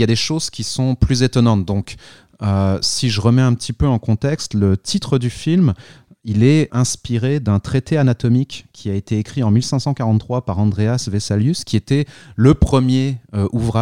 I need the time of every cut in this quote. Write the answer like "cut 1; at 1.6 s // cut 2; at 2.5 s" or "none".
cut 1; at 6.7 s